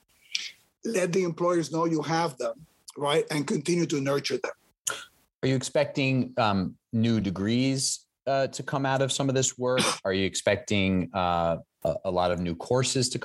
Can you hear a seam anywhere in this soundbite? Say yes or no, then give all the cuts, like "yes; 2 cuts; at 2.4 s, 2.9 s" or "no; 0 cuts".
no; 0 cuts